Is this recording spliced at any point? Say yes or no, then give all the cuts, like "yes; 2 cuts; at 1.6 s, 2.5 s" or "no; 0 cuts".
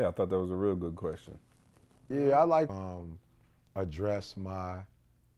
yes; 1 cut; at 2.7 s